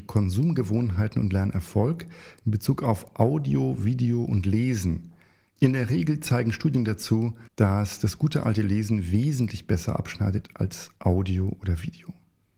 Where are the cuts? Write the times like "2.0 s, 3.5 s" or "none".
7.5 s